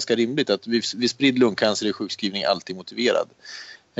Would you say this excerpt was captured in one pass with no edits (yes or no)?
yes